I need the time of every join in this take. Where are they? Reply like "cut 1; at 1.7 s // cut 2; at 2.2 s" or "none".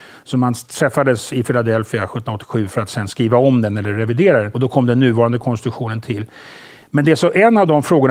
cut 1; at 4.5 s